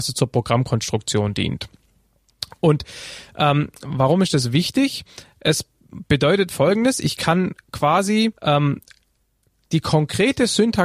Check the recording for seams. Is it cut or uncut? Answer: cut